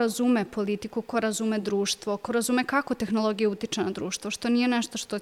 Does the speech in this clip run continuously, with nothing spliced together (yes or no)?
yes